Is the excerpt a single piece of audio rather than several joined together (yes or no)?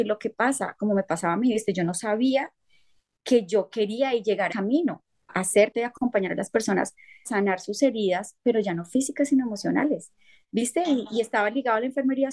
no